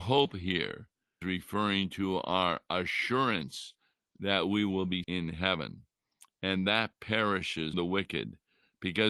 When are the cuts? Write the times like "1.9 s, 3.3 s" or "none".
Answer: 1.2 s, 5.0 s, 7.7 s